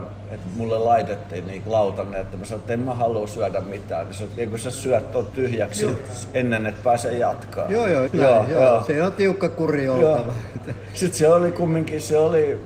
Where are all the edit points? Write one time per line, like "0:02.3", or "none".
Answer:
0:01.6
0:05.9
0:08.1

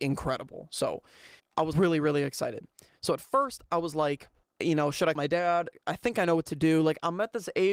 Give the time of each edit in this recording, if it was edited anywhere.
0:01.4
0:01.7
0:04.4
0:05.1

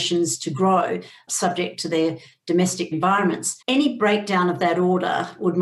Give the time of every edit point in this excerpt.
0:01.3
0:02.9
0:03.6

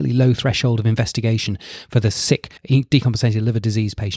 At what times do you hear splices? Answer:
0:02.6

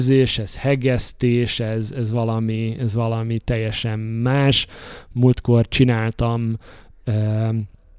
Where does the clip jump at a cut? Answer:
none

